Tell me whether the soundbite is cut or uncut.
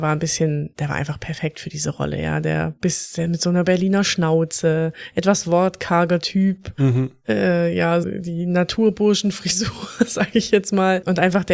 cut